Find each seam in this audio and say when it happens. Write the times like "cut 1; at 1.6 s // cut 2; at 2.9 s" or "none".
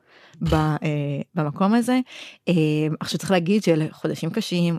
none